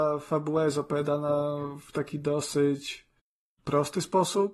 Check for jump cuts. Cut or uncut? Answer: uncut